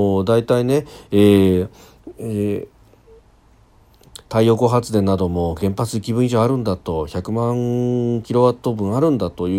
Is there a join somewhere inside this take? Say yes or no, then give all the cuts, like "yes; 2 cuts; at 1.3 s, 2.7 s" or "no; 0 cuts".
no; 0 cuts